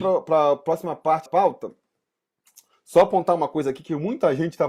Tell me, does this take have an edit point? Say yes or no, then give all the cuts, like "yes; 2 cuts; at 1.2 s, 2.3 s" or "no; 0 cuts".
yes; 1 cut; at 1.3 s